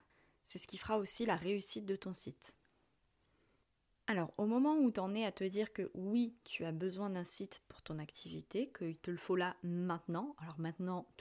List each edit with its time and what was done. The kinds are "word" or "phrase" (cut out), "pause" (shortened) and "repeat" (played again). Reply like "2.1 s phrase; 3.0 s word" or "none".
none